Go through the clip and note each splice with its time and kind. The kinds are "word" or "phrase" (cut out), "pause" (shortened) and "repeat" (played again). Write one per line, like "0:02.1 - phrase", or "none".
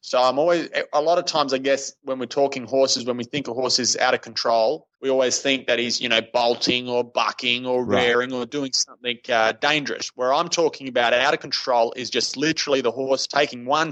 0:04.9 - pause